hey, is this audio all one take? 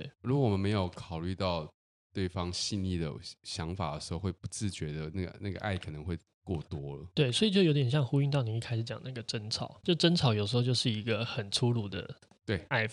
no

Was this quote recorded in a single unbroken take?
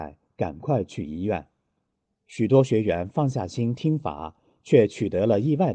yes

